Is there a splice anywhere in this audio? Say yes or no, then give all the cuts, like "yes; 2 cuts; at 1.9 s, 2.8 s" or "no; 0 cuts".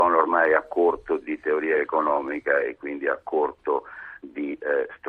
no; 0 cuts